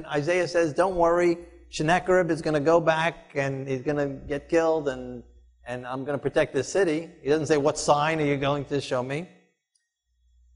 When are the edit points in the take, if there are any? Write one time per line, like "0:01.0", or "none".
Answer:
none